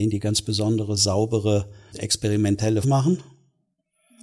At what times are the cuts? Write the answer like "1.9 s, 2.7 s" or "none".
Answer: 1.9 s, 2.8 s

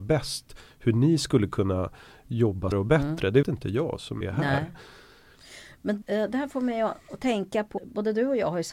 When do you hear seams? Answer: 2.7 s, 3.4 s, 4.2 s, 6.0 s, 7.8 s

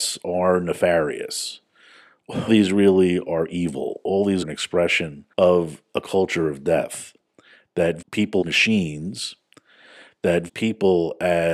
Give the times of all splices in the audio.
2.5 s, 4.4 s, 5.3 s, 8.0 s, 8.4 s, 10.5 s

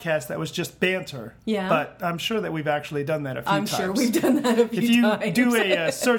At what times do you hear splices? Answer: 1.4 s

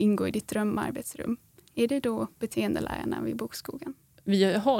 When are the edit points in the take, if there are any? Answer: none

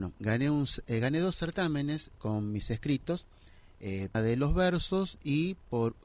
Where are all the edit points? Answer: 4.1 s

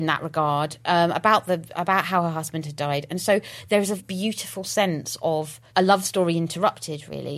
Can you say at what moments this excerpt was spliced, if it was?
4.0 s, 5.7 s

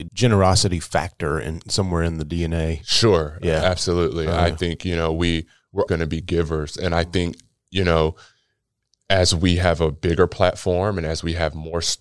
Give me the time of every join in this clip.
5.9 s

